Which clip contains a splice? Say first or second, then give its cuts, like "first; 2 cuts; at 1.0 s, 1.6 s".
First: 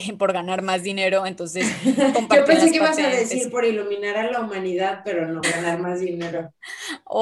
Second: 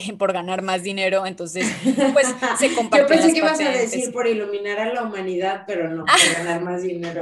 first; 2 cuts; at 2.1 s, 5.4 s